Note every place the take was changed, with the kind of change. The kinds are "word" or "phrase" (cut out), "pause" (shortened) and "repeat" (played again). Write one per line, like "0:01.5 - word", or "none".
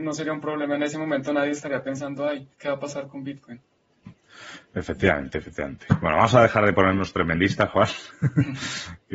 0:02.5 - pause